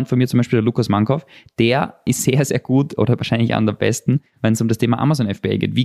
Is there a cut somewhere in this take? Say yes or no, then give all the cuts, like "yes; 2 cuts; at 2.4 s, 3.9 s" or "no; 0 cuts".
no; 0 cuts